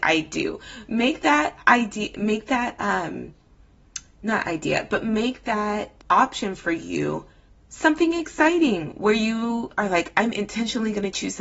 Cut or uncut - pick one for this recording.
cut